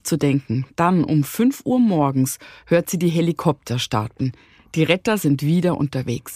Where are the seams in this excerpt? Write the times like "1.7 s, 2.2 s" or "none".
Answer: none